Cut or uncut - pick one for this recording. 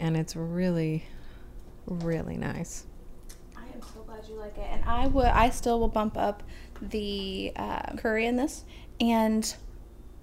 uncut